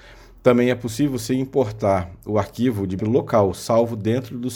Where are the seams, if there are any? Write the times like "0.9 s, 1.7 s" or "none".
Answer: 3.0 s